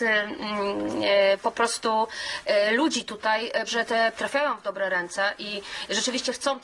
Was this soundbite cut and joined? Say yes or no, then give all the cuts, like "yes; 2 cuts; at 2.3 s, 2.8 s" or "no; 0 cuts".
yes; 2 cuts; at 3.7 s, 4.1 s